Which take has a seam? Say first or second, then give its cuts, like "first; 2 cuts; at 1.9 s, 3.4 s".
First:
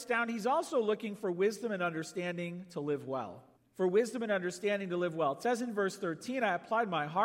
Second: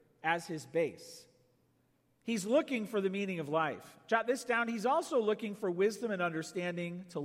first; 1 cut; at 3.6 s